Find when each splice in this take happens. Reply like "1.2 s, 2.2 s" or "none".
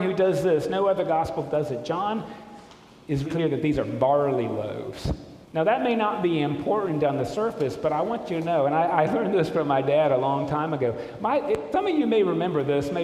3.2 s, 5.4 s

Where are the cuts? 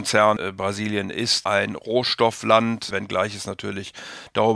1.4 s

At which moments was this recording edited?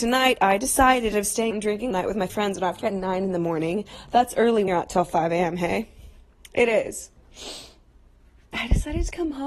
1.1 s, 1.5 s, 1.9 s, 2.3 s, 2.8 s, 4.7 s

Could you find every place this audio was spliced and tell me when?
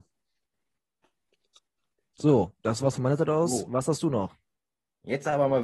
none

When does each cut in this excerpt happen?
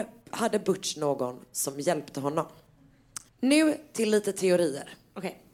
3.3 s

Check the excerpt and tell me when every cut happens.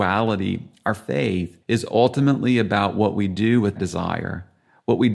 1.6 s, 3.8 s

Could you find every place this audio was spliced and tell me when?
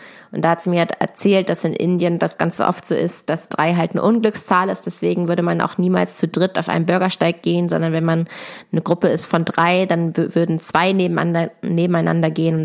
none

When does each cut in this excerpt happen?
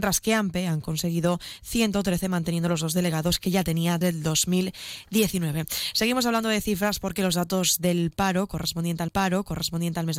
4.0 s, 9.1 s

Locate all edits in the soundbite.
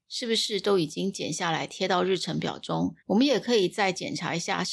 3.0 s

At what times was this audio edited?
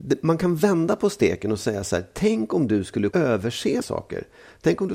3.1 s, 3.8 s

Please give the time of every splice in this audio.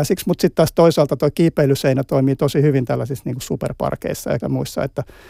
4.4 s

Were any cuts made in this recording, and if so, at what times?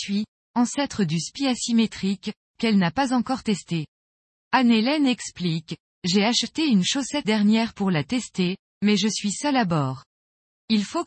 7.2 s

